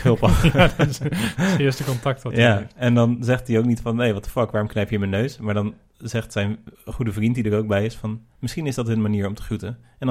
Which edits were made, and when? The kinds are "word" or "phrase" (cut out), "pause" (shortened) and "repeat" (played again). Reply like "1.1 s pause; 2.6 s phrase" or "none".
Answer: 6.7 s pause